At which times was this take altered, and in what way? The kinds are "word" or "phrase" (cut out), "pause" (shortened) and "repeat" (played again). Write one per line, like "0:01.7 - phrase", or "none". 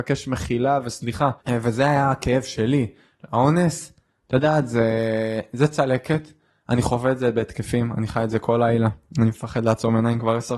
0:01.4 - pause